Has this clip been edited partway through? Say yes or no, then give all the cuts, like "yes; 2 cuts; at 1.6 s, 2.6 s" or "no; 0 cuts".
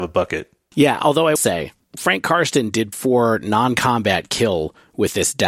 yes; 2 cuts; at 1.4 s, 2.9 s